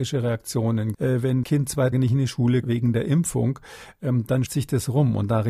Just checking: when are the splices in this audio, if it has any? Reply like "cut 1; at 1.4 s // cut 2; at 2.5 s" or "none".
cut 1; at 0.9 s // cut 2; at 1.4 s // cut 3; at 1.9 s // cut 4; at 2.6 s // cut 5; at 4.5 s